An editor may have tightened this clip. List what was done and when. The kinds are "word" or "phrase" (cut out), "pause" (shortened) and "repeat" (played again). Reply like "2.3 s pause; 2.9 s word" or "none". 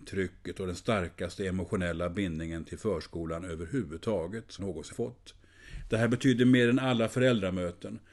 4.6 s word; 4.9 s word